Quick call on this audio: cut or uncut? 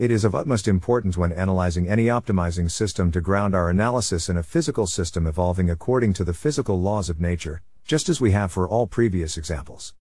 uncut